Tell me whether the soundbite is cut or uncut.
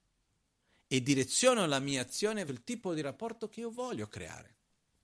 cut